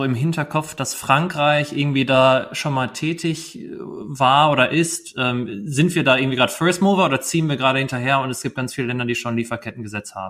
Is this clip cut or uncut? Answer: uncut